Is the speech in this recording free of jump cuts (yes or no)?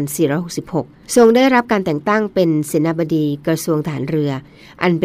no